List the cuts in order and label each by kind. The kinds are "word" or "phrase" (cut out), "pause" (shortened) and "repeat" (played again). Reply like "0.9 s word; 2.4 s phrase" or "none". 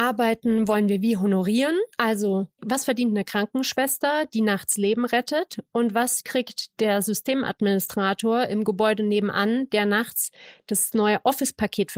1.9 s pause